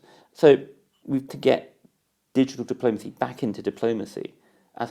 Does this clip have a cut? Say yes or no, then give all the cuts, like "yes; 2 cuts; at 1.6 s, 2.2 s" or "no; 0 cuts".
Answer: yes; 1 cut; at 1.3 s